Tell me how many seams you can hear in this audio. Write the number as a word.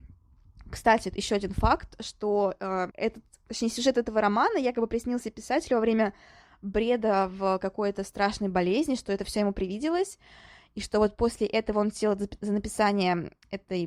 one